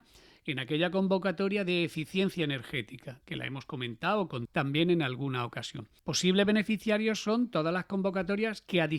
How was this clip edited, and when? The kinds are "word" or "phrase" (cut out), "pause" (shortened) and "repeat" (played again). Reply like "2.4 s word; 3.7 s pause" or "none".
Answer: 4.5 s word; 6.0 s pause